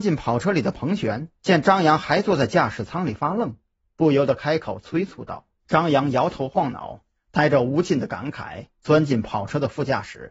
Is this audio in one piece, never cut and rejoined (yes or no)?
no